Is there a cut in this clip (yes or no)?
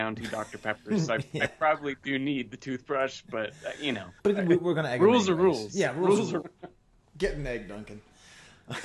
yes